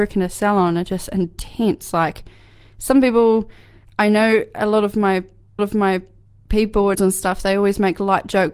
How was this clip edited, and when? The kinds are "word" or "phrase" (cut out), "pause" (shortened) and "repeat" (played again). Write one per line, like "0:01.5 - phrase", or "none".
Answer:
0:05.6 - repeat
0:06.9 - phrase